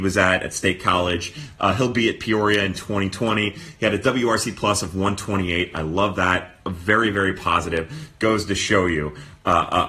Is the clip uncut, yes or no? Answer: yes